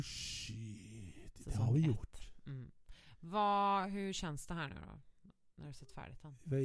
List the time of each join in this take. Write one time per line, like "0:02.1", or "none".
none

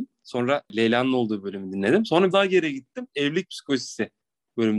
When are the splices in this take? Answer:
0:02.3

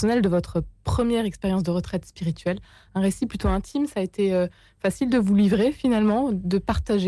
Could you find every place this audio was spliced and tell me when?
none

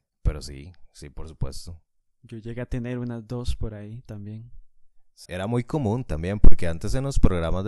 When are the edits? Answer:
0:05.3

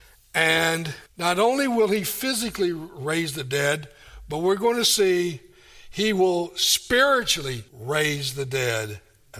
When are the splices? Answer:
0:01.1
0:07.7

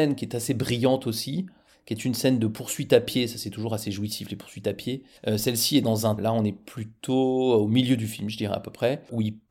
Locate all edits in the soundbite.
0:06.2

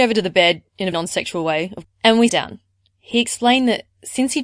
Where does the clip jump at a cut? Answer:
0:00.9
0:01.8
0:02.3

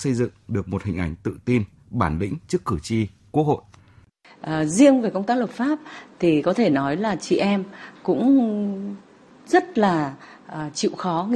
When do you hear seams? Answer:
none

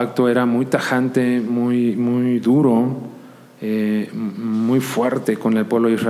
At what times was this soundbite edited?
none

